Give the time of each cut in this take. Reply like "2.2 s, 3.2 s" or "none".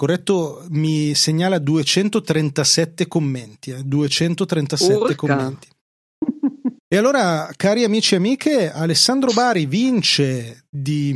6.8 s